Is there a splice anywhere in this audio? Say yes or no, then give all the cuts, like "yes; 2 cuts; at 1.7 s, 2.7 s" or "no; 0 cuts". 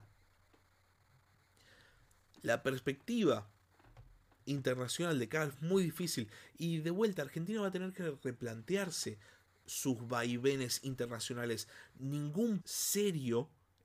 yes; 3 cuts; at 5.5 s, 9.6 s, 12.6 s